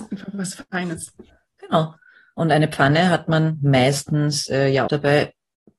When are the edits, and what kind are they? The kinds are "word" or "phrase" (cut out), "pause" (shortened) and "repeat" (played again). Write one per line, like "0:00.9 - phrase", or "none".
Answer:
0:04.9 - word